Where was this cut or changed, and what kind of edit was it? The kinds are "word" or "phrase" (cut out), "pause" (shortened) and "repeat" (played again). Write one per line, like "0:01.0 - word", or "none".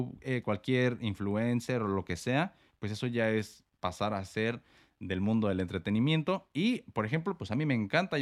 none